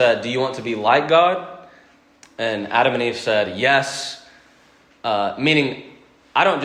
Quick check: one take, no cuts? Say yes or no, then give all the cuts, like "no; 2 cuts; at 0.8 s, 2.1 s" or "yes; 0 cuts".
yes; 0 cuts